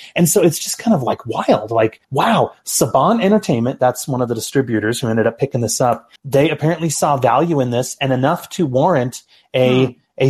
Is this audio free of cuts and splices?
no; 2 cuts; at 2.0 s, 6.2 s

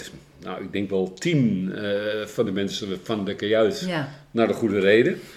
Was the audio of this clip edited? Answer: no; 0 cuts

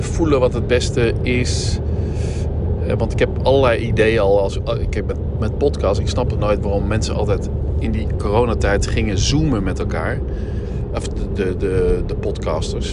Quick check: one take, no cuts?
yes; 0 cuts

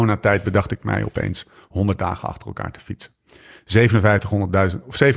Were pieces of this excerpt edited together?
no; 0 cuts

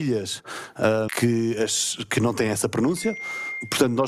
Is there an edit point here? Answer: yes; 1 cut; at 1.1 s

